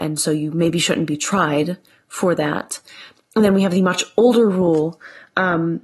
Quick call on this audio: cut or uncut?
uncut